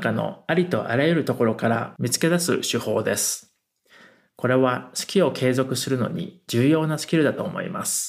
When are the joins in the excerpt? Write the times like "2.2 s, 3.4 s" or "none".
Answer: none